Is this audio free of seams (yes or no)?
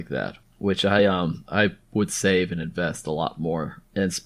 yes